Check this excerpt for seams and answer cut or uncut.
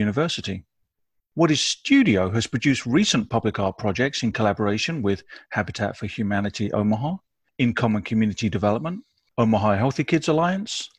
uncut